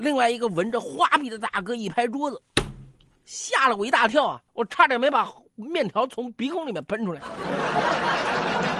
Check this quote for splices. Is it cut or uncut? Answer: cut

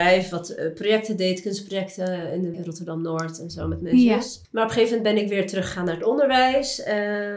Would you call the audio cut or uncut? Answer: cut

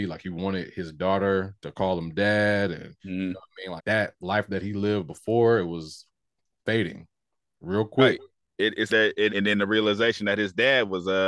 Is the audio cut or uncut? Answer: cut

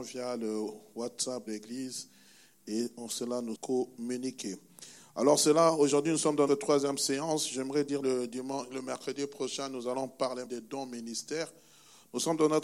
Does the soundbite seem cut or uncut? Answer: cut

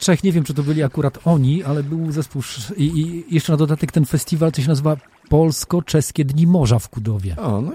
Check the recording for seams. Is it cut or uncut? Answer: uncut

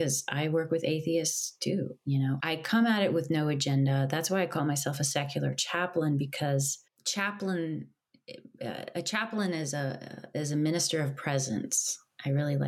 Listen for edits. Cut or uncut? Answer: cut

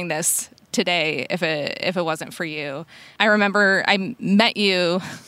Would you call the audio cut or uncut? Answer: uncut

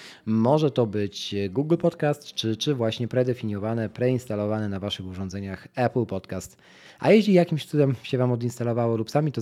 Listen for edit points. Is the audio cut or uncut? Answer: uncut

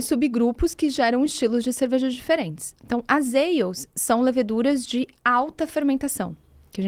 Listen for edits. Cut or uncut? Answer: uncut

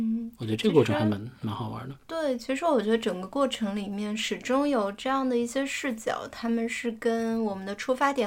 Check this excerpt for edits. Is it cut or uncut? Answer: cut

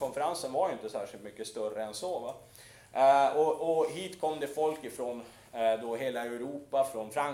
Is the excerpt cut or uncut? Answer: uncut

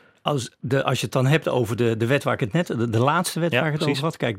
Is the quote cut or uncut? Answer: uncut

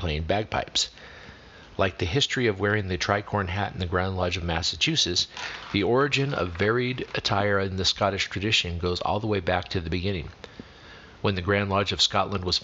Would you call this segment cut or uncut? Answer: uncut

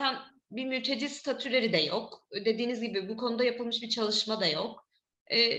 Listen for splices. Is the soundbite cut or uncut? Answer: uncut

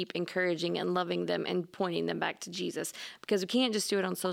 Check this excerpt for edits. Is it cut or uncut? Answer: uncut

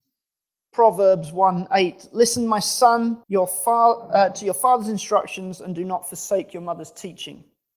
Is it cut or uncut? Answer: cut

